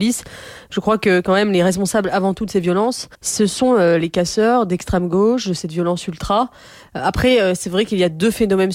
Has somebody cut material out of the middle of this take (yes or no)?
yes